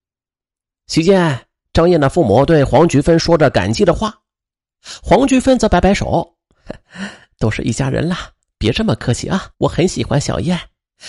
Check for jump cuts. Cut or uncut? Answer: cut